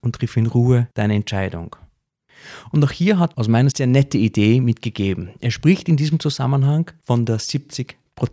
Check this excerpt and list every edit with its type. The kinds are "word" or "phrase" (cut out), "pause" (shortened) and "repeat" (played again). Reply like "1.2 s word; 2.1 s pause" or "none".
0.9 s pause; 3.3 s phrase; 3.7 s word